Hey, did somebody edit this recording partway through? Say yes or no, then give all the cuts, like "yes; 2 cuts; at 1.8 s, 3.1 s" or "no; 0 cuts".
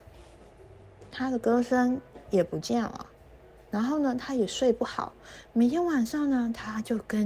no; 0 cuts